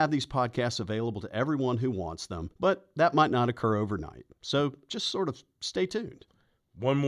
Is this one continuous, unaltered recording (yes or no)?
no